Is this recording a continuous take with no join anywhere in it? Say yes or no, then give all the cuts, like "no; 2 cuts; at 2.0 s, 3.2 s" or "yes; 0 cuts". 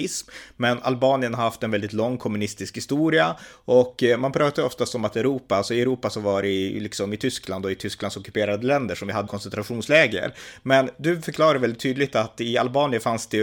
no; 1 cut; at 9.3 s